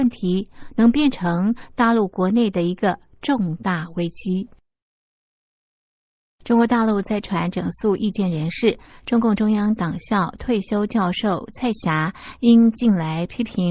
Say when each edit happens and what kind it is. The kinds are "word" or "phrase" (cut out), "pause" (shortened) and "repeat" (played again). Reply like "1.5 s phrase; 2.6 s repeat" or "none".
none